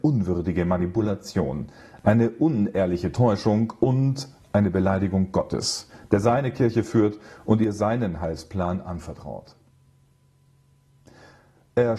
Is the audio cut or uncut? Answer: uncut